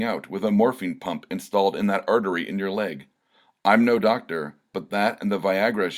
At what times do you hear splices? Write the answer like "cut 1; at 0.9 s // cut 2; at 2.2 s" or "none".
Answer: none